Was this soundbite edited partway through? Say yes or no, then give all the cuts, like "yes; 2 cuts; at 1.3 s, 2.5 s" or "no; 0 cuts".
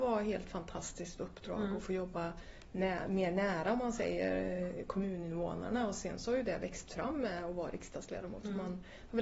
no; 0 cuts